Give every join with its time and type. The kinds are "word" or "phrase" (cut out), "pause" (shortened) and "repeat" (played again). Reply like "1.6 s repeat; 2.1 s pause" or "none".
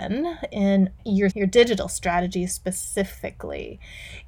1.0 s word; 1.3 s word